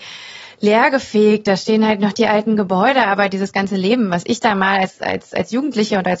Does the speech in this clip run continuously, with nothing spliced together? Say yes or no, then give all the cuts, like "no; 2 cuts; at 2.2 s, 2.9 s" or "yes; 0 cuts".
yes; 0 cuts